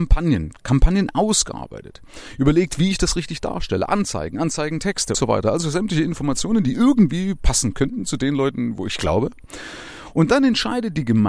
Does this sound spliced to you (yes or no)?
yes